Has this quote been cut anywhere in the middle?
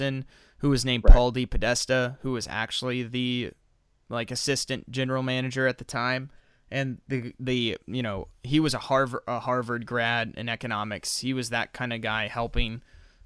no; 0 cuts

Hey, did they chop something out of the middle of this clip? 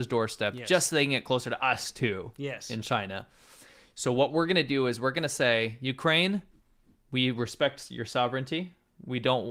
no; 0 cuts

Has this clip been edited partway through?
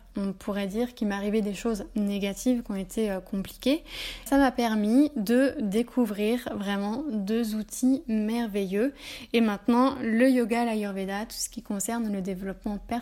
yes; 1 cut; at 4.3 s

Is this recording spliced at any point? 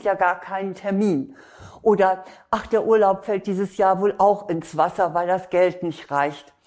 no; 0 cuts

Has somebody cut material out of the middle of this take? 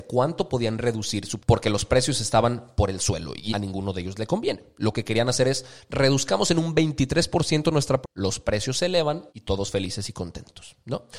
yes; 4 cuts; at 1.4 s, 3.5 s, 8.0 s, 9.3 s

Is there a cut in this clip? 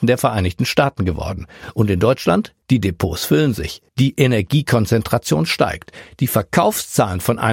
yes; 2 cuts; at 2.6 s, 3.9 s

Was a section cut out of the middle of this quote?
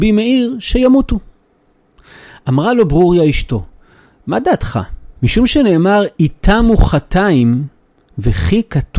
yes; 1 cut; at 5.2 s

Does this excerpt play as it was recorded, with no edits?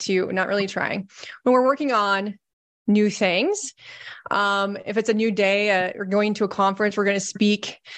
yes; 0 cuts

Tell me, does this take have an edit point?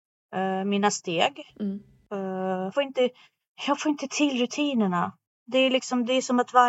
yes; 1 cut; at 2.7 s

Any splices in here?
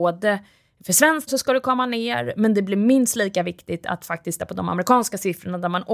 yes; 2 cuts; at 1.3 s, 4.4 s

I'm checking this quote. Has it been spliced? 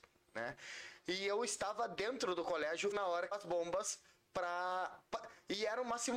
yes; 2 cuts; at 2.9 s, 3.3 s

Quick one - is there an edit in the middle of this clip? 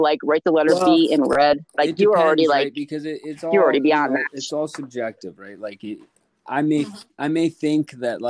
no; 0 cuts

